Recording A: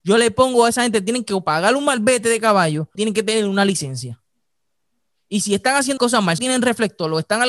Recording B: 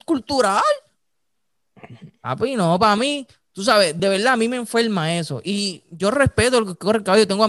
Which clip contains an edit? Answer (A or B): A